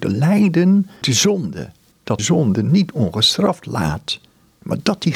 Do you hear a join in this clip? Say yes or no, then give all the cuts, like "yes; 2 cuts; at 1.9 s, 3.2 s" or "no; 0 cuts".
yes; 2 cuts; at 1.0 s, 2.2 s